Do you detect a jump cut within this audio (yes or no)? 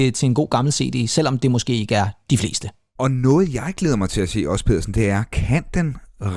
no